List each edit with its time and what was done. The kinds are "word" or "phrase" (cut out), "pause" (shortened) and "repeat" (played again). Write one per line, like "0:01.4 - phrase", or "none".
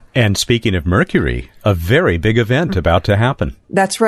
none